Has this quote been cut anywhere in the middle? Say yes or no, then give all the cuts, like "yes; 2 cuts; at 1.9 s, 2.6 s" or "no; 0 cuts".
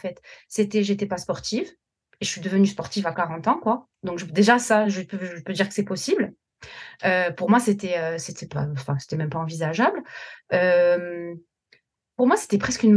no; 0 cuts